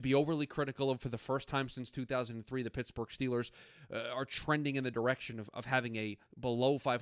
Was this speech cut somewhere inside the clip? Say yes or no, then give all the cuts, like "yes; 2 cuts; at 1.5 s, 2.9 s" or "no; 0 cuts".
no; 0 cuts